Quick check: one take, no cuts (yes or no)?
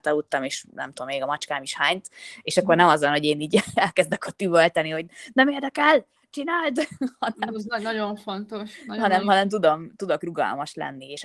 yes